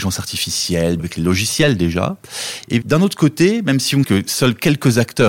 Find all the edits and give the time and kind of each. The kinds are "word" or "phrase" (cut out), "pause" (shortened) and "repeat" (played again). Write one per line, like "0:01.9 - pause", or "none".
0:01.0 - word
0:02.8 - word
0:04.0 - word